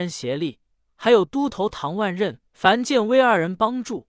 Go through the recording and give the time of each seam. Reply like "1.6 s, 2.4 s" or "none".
2.5 s